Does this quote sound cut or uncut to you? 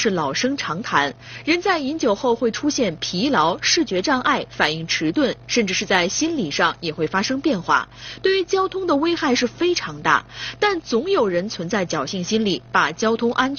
uncut